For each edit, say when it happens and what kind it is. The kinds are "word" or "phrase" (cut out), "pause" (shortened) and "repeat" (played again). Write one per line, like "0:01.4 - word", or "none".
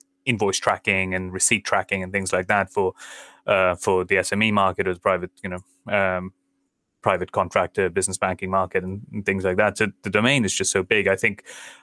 none